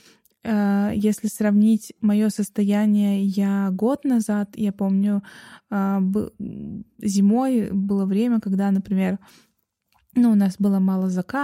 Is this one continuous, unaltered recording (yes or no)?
yes